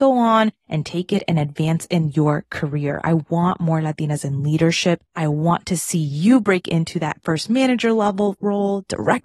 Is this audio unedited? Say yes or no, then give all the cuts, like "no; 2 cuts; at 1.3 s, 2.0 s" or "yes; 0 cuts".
no; 1 cut; at 5.1 s